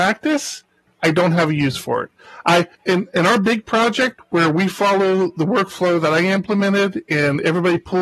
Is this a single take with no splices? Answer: no; 1 cut; at 2.7 s

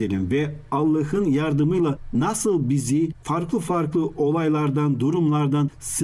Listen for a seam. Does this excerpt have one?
no; 0 cuts

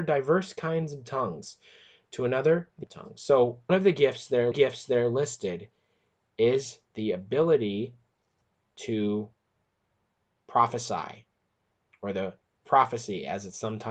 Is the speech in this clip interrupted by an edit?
yes; 5 cuts; at 2.8 s, 3.7 s, 4.5 s, 6.8 s, 12.6 s

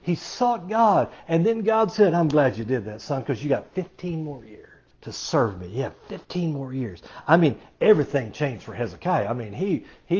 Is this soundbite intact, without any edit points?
no; 1 cut; at 4.9 s

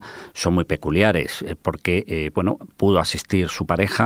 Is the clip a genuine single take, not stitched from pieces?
yes; 0 cuts

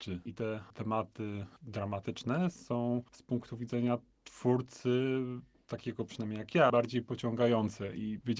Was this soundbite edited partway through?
no; 0 cuts

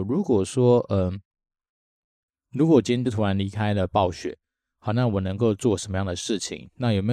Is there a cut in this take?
no; 0 cuts

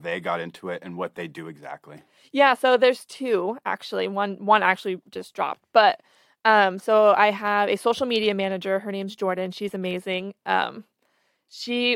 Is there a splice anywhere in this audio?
no; 0 cuts

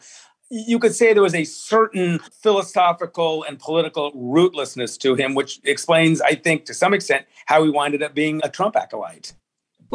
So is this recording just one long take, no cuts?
no; 2 cuts; at 2.3 s, 8.4 s

